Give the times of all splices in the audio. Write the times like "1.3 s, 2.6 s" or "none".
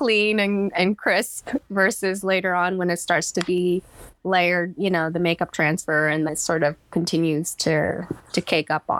5.1 s, 6.3 s